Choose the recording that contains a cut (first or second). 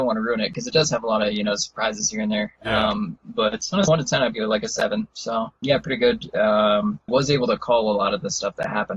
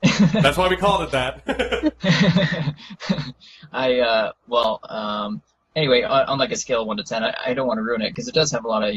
first